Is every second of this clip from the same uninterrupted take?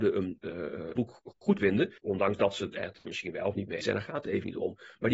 no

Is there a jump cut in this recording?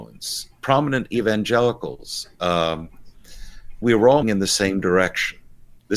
yes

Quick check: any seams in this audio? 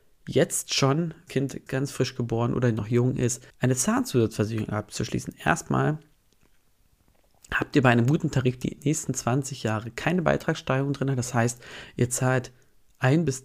yes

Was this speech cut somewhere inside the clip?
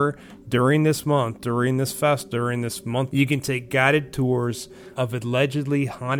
yes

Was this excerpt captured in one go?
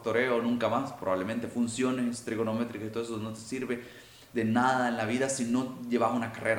yes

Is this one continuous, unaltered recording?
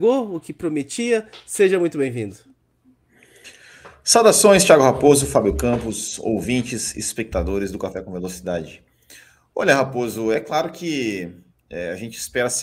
yes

